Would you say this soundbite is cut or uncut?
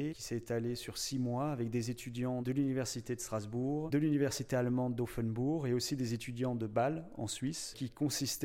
uncut